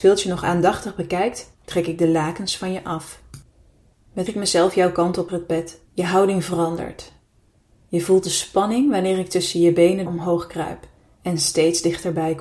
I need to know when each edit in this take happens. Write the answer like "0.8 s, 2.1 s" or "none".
1.5 s, 4.3 s, 5.3 s, 5.9 s, 10.1 s